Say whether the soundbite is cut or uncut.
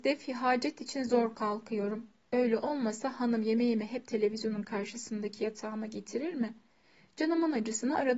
uncut